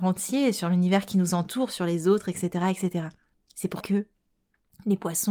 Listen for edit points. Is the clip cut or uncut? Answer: cut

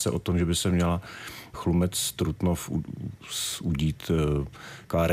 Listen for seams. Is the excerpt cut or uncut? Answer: cut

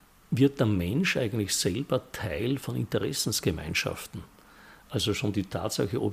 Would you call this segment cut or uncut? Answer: cut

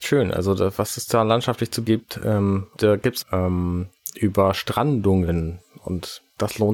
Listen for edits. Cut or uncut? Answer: cut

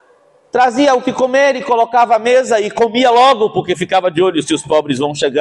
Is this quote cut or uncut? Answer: uncut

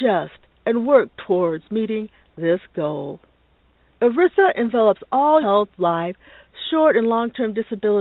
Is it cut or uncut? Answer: cut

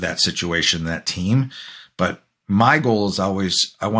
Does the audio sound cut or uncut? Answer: uncut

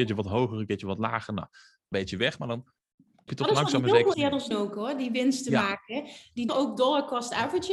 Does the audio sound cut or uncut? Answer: cut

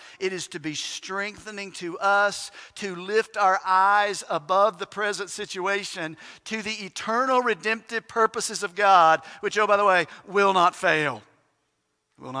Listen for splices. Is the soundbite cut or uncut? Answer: uncut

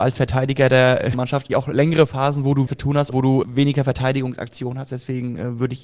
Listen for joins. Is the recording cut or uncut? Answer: cut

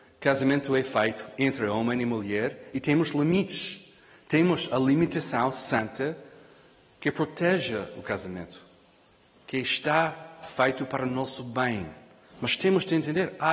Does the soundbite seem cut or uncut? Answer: uncut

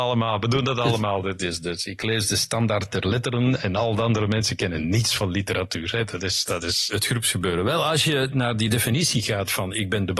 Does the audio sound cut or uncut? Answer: uncut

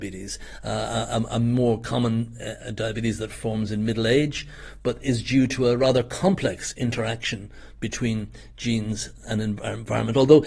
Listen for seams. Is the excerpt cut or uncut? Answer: uncut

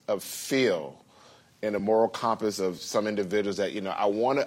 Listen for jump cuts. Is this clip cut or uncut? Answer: uncut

